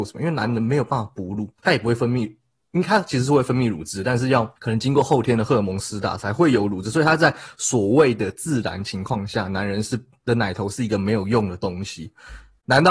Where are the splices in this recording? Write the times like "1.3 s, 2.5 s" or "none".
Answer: 1.6 s, 4.6 s